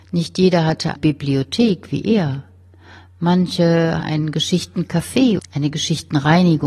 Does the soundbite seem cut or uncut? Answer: cut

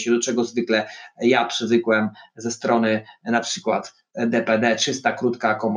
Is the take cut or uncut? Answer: uncut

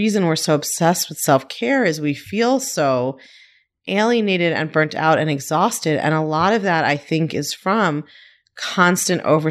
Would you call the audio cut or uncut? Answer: uncut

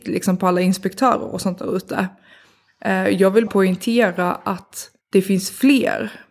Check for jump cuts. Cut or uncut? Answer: cut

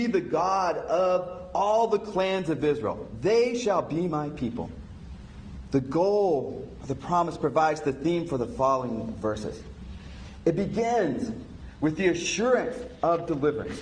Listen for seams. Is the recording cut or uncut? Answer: uncut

